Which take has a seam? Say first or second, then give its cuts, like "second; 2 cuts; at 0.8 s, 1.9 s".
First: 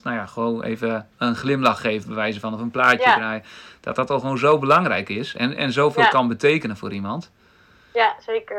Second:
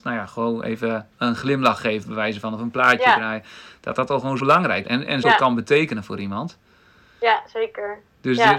second; 3 cuts; at 4.4 s, 4.8 s, 5.2 s